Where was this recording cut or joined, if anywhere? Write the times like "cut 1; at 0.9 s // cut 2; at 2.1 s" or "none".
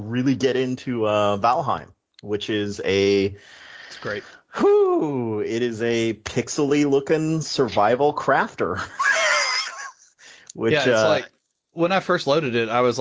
none